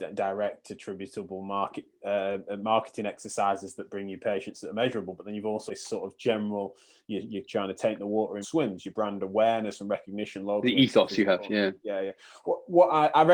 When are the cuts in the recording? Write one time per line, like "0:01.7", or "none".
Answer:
0:05.7
0:07.4
0:08.4